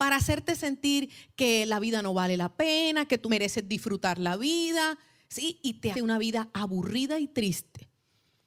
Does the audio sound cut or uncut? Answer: cut